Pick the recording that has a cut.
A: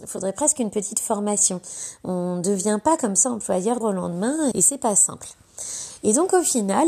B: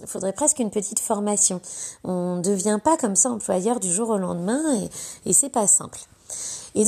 A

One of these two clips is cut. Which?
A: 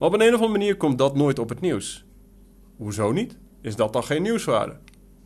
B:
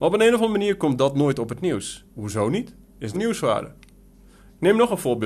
B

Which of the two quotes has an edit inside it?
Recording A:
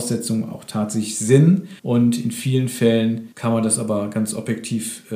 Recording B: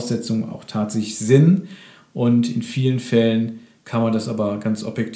A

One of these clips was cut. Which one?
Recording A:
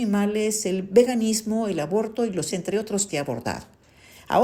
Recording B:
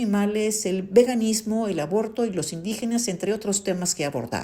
A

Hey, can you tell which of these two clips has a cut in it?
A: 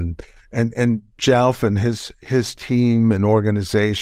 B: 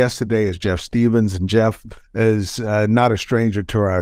B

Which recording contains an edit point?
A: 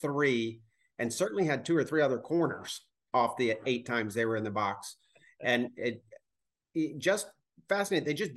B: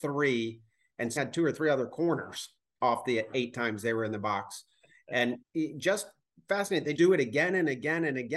B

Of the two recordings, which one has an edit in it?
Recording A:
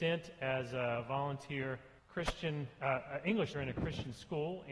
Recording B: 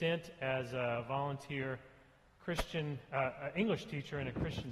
A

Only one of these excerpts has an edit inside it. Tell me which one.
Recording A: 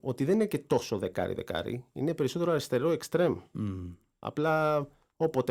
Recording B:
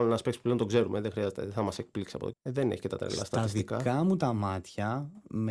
B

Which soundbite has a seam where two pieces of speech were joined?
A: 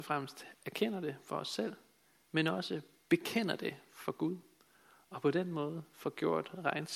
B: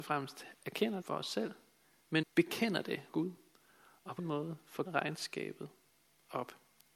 B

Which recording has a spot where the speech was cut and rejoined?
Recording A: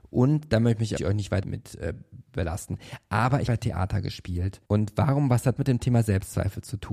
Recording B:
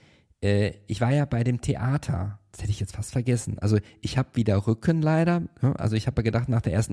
A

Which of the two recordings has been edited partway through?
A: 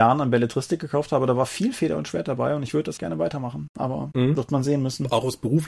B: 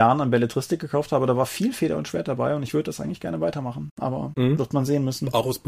A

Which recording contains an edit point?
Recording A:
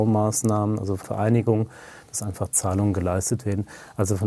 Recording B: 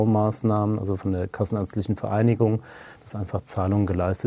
A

